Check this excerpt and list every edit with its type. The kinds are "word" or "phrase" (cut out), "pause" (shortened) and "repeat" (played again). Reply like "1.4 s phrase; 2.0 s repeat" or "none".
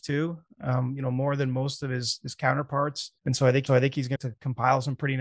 3.2 s pause; 3.7 s repeat; 4.2 s phrase